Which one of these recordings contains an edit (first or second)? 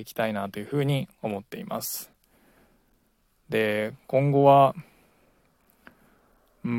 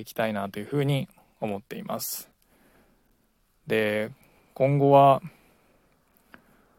first